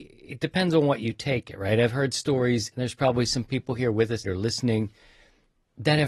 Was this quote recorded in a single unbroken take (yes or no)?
no